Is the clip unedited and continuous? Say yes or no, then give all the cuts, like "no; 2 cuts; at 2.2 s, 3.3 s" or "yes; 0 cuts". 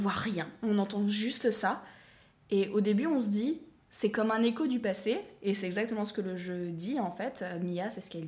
yes; 0 cuts